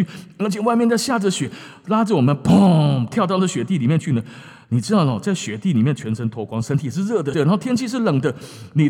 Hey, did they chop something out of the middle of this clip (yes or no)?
yes